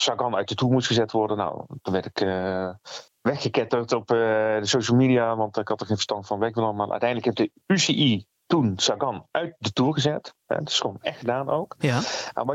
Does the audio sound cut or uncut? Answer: cut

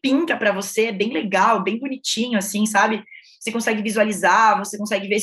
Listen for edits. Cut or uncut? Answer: uncut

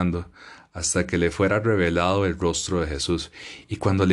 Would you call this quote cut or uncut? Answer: uncut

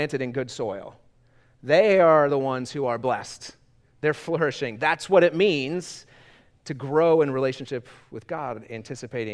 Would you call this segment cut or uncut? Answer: uncut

